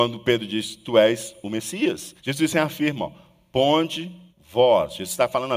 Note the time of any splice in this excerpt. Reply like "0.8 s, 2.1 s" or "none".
2.2 s, 4.3 s